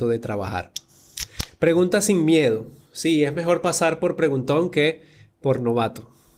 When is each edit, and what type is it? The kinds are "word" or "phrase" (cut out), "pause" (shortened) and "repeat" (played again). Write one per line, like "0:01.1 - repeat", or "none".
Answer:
none